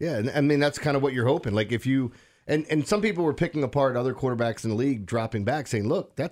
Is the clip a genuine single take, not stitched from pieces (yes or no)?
yes